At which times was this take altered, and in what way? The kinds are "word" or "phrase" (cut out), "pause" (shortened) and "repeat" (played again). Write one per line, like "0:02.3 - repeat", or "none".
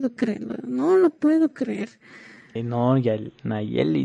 none